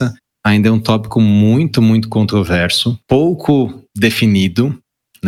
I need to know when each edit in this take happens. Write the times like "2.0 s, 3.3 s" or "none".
3.0 s